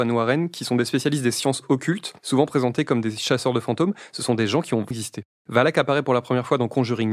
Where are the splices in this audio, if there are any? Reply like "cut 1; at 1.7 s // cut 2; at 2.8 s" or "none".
cut 1; at 2.2 s // cut 2; at 4.9 s